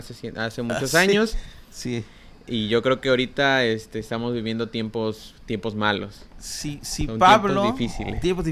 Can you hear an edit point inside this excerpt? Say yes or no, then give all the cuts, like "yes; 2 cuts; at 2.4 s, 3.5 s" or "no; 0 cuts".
no; 0 cuts